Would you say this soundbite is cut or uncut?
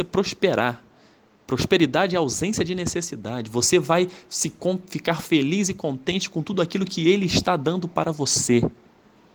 uncut